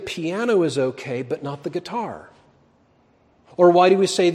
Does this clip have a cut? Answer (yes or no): no